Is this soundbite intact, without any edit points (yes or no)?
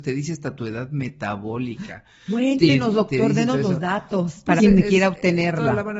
no